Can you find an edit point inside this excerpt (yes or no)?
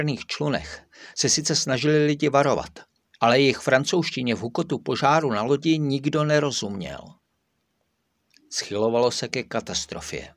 no